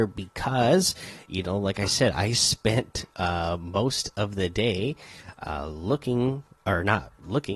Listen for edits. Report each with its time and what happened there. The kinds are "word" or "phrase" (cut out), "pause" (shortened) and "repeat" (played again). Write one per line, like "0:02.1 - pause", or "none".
none